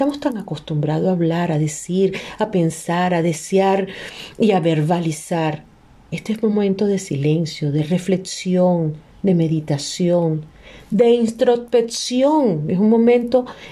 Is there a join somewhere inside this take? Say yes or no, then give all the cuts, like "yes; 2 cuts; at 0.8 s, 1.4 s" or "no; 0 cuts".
no; 0 cuts